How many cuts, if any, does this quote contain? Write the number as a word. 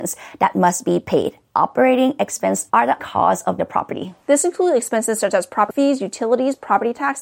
three